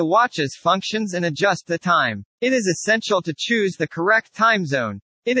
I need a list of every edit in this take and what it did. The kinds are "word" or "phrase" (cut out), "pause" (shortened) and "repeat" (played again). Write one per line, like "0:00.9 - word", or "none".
0:02.3 - pause